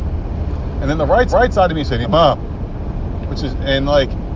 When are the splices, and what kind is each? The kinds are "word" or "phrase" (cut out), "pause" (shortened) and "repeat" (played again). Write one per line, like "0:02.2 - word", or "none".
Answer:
0:01.3 - repeat
0:02.0 - word